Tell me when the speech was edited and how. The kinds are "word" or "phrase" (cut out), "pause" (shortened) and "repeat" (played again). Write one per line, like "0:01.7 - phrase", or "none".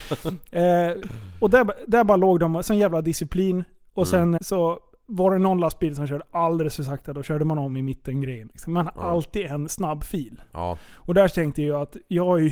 0:04.4 - word